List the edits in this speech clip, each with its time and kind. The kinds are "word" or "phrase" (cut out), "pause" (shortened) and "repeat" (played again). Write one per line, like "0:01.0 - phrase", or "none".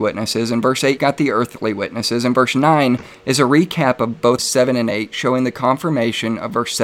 0:01.0 - word
0:04.4 - word